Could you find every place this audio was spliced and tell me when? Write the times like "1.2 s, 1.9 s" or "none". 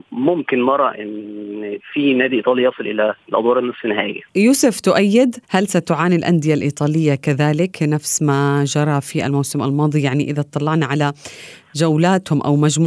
4.3 s, 5.4 s